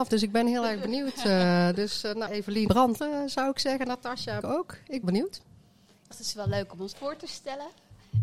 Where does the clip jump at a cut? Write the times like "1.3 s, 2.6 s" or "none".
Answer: 2.3 s, 2.7 s, 3.0 s, 4.4 s, 5.0 s, 6.1 s, 6.9 s